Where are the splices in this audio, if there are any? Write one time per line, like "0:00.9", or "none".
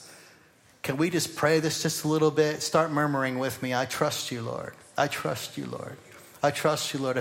none